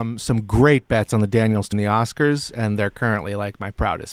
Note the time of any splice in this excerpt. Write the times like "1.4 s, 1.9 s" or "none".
1.7 s